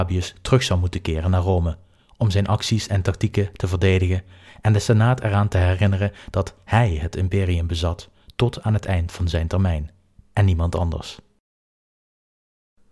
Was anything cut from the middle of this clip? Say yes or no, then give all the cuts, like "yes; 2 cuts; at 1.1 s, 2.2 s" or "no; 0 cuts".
no; 0 cuts